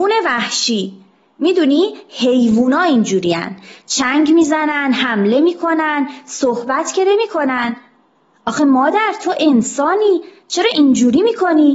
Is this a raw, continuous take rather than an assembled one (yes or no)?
yes